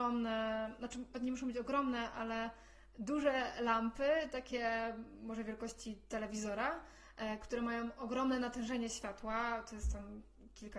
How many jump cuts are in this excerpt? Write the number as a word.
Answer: one